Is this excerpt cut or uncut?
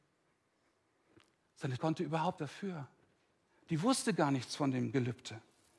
cut